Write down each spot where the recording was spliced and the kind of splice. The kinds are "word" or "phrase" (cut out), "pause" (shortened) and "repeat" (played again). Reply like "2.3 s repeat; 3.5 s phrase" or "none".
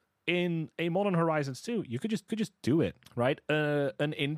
2.3 s repeat; 3.0 s pause